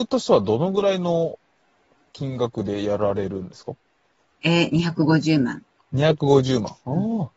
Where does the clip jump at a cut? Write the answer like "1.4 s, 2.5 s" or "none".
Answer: none